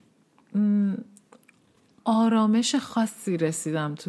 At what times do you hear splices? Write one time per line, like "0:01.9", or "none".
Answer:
none